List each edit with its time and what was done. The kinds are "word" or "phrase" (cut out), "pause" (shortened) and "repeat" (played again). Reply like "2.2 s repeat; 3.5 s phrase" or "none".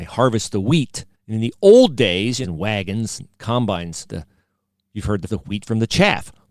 1.1 s pause; 2.4 s phrase; 4.1 s word; 5.3 s word